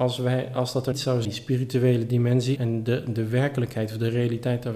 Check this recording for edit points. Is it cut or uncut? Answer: cut